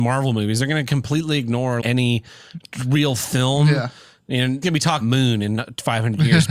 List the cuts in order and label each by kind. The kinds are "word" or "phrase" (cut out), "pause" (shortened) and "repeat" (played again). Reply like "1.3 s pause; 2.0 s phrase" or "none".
1.8 s word; 4.6 s word; 5.0 s word